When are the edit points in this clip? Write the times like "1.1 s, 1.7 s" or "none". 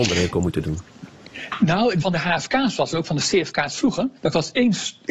2.0 s, 4.2 s